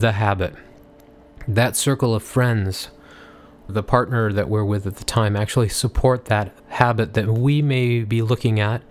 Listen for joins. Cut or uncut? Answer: cut